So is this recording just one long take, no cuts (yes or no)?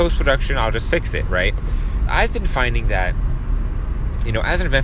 no